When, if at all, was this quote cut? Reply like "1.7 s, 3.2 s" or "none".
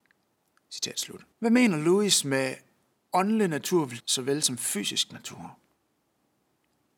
1.3 s, 4.0 s